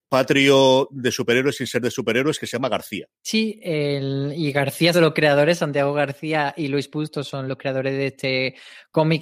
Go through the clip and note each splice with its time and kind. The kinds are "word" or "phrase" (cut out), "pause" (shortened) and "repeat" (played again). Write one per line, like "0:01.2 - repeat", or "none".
0:03.2 - pause
0:04.9 - phrase
0:07.5 - word